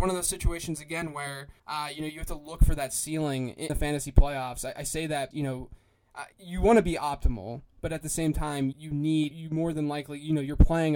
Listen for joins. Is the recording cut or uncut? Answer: cut